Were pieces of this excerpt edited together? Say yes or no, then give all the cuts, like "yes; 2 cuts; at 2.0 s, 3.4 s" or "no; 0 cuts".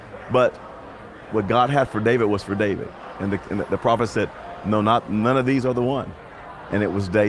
no; 0 cuts